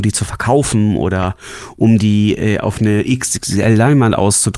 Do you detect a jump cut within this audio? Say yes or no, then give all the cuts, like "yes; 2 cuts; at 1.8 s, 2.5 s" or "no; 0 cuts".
no; 0 cuts